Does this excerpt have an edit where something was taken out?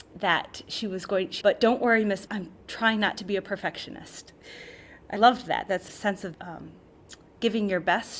yes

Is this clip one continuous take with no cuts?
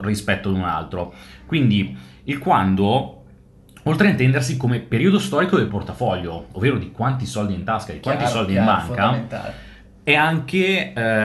no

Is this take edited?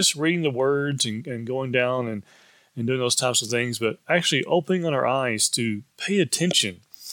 no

